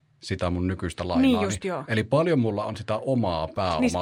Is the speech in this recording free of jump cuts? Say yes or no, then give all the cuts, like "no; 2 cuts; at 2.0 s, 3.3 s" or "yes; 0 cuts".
yes; 0 cuts